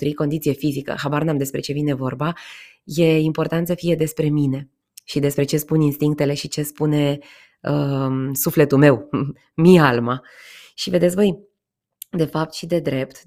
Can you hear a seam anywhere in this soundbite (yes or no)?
no